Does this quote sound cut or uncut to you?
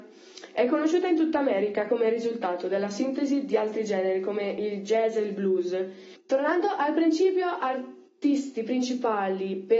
uncut